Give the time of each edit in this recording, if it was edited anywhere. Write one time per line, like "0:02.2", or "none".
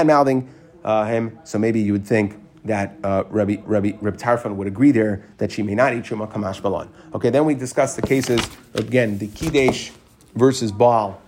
0:02.5
0:03.6